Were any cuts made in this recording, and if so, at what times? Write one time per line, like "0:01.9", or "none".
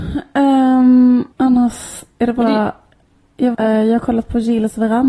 0:01.3
0:03.5